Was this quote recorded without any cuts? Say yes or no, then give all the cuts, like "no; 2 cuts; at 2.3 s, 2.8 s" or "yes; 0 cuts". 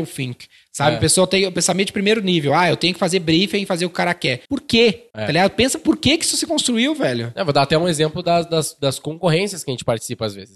no; 2 cuts; at 4.5 s, 5.1 s